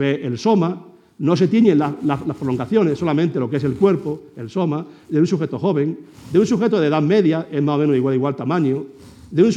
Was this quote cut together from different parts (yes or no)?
no